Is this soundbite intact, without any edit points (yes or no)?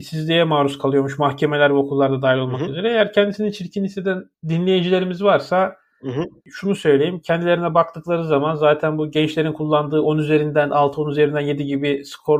yes